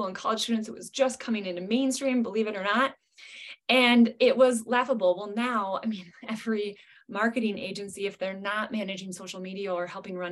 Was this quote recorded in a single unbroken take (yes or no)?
yes